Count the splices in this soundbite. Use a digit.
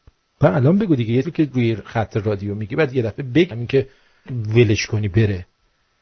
3